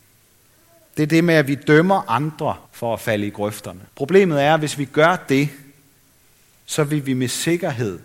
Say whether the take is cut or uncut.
cut